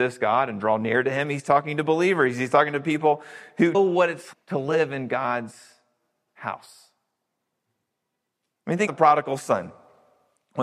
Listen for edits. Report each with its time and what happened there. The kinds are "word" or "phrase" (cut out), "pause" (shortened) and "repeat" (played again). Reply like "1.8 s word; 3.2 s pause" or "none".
3.7 s word; 4.3 s word; 8.9 s word